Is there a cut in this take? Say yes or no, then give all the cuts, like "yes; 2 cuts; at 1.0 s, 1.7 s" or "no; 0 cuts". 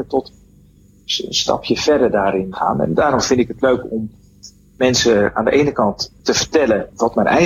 yes; 1 cut; at 2.5 s